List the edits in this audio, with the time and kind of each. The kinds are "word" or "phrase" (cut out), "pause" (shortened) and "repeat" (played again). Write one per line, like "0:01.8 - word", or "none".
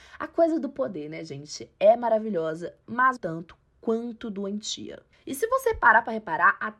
0:03.2 - word